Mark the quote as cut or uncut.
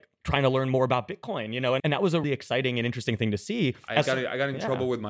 cut